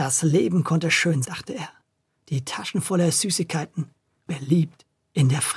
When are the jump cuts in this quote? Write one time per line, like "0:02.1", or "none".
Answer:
0:01.2
0:04.3

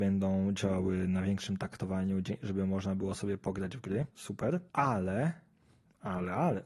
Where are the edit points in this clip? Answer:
none

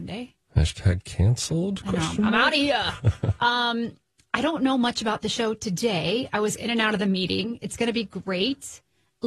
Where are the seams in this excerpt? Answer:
none

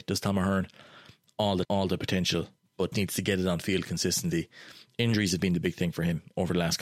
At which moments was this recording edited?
0:01.6
0:02.9

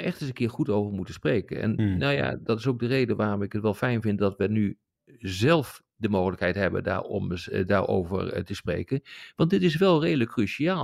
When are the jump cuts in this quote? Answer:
none

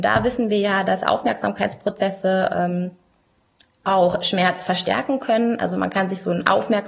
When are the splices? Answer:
none

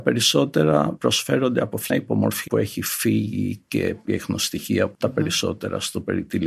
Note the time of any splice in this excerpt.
0:01.9
0:02.5
0:04.1
0:04.9

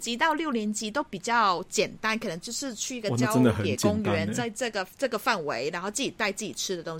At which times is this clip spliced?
none

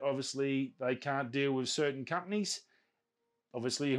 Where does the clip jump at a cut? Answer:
none

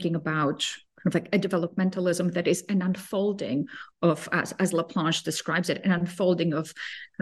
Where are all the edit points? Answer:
none

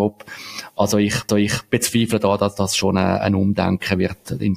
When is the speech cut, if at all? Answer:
0:01.3

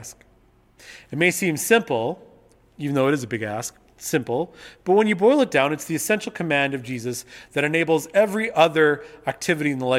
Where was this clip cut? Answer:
none

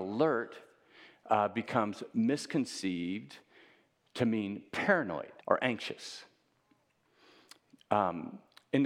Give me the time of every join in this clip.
0:05.4

